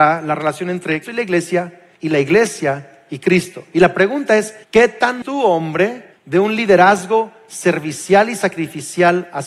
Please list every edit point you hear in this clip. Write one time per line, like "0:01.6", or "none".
0:01.0
0:01.9
0:04.6
0:05.2
0:06.1